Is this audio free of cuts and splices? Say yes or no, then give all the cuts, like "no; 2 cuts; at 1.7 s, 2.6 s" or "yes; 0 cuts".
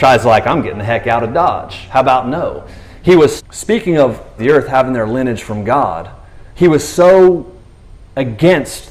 no; 3 cuts; at 3.4 s, 4.4 s, 6.5 s